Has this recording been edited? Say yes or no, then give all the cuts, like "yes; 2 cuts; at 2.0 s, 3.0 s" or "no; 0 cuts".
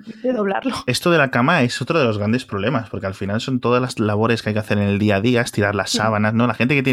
no; 0 cuts